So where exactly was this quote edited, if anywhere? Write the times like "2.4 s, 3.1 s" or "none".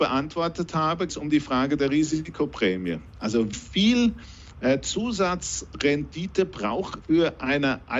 1.1 s, 3.5 s, 7.0 s